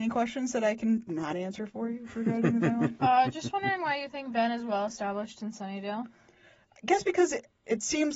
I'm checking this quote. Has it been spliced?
no; 0 cuts

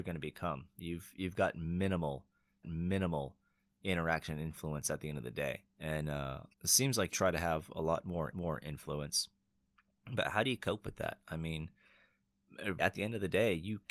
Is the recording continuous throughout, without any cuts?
no; 6 cuts; at 2.6 s, 5.7 s, 6.5 s, 7.1 s, 8.3 s, 12.8 s

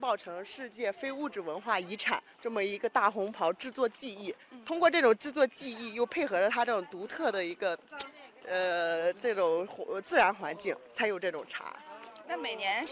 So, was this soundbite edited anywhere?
yes; 1 cut; at 2.3 s

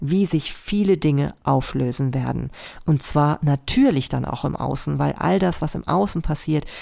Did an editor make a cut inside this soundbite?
no; 0 cuts

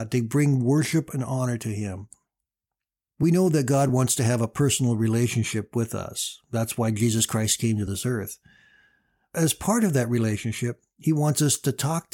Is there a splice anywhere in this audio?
no; 0 cuts

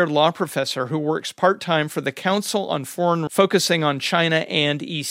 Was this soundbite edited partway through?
yes; 1 cut; at 3.3 s

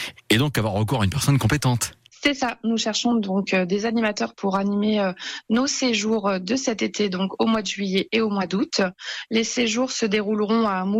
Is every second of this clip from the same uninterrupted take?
yes; 0 cuts

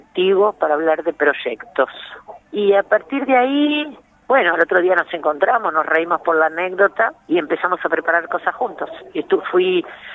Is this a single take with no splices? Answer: no; 3 cuts; at 2.4 s, 4.1 s, 7.2 s

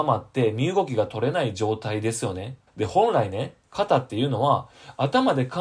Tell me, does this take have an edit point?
yes; 1 cut; at 2.7 s

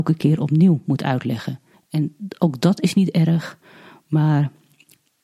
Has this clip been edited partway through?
yes; 1 cut; at 1.7 s

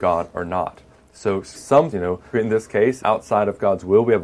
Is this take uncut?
no; 4 cuts; at 1.5 s, 1.9 s, 2.3 s, 3.0 s

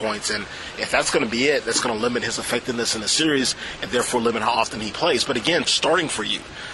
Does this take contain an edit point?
yes; 1 cut; at 5.7 s

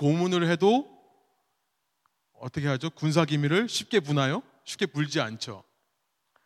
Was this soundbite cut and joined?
no; 0 cuts

